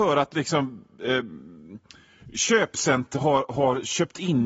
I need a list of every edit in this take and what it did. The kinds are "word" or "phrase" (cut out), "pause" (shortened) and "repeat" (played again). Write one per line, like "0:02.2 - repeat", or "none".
0:03.1 - word